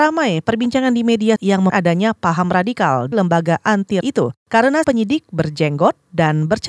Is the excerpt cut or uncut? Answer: cut